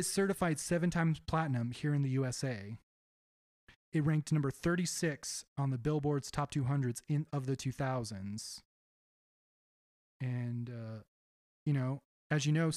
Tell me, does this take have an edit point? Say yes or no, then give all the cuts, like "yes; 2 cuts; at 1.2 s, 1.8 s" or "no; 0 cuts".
no; 0 cuts